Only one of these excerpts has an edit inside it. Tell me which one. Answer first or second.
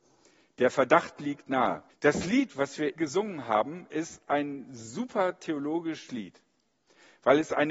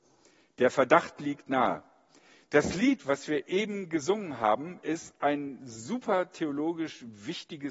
first